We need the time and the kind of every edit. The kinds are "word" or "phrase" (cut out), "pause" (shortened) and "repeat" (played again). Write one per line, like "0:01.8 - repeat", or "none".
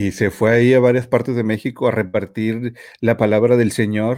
none